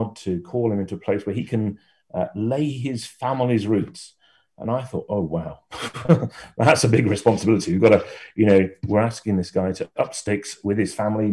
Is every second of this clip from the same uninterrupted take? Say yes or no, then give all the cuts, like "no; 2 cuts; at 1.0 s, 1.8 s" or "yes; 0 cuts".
yes; 0 cuts